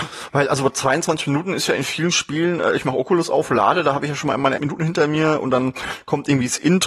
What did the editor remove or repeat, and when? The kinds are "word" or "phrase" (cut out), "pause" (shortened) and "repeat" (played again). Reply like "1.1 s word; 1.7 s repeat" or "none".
4.6 s word